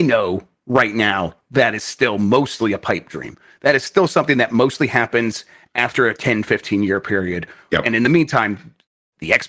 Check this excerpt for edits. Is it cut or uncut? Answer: uncut